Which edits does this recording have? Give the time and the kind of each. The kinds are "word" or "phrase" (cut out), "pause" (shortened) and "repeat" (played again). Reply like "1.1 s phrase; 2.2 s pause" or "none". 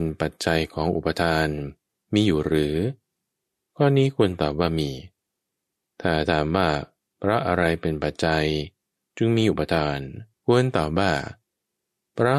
10.3 s pause